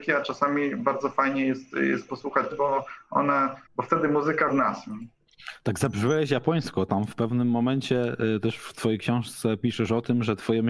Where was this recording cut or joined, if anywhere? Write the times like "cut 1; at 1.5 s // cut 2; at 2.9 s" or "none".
cut 1; at 1.7 s // cut 2; at 2.5 s // cut 3; at 3.7 s // cut 4; at 4.5 s